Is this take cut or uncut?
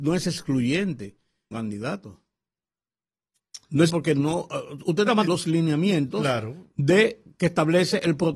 cut